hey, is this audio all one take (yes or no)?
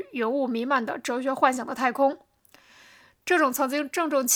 yes